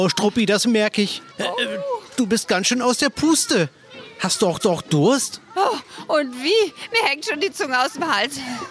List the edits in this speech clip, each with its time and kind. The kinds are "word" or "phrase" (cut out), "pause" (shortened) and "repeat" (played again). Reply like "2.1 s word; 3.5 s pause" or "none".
1.3 s pause; 4.6 s repeat